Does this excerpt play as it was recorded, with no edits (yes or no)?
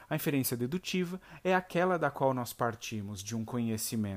yes